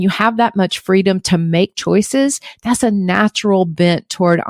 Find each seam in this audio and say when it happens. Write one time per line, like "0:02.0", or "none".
0:01.7